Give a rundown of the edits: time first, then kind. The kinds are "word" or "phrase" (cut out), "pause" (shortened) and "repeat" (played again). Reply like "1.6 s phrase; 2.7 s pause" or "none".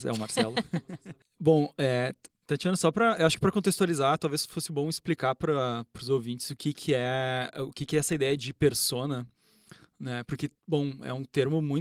2.4 s pause; 10.6 s pause